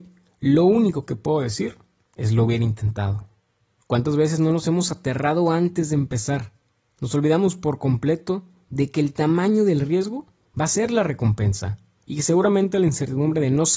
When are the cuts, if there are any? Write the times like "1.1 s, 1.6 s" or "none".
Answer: none